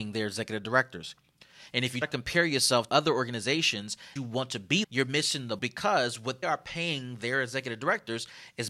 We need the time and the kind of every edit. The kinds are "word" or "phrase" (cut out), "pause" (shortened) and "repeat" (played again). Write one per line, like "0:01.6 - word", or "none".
0:02.0 - word
0:02.9 - word
0:04.2 - word
0:04.8 - word
0:05.6 - word
0:06.4 - word